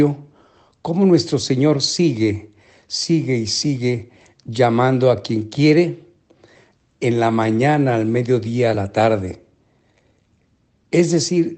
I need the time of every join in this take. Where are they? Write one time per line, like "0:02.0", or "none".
none